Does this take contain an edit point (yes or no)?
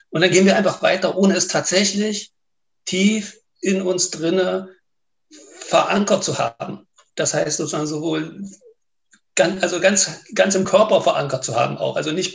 no